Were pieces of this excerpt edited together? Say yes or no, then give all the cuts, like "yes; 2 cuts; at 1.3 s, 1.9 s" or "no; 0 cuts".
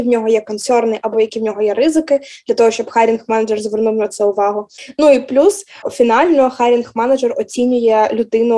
no; 0 cuts